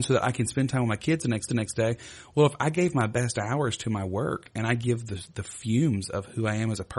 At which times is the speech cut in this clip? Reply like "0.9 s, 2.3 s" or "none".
1.5 s